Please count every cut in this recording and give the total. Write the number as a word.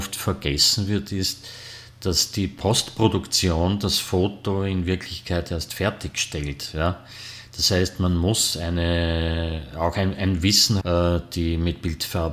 one